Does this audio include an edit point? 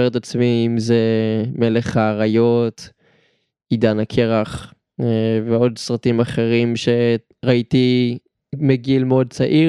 no; 0 cuts

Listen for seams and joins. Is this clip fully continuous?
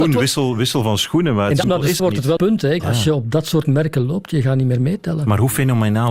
no; 4 cuts; at 1.6 s, 2.0 s, 2.4 s, 2.8 s

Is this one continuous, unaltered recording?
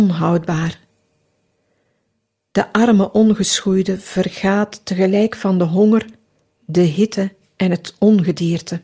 yes; 0 cuts

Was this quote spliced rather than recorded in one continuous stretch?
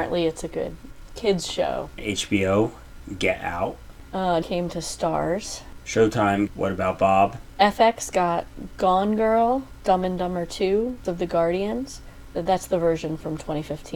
yes; 6 cuts; at 1.1 s, 2.0 s, 4.4 s, 6.5 s, 11.0 s, 12.3 s

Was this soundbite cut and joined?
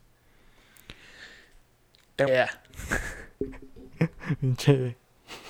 yes; 1 cut; at 2.3 s

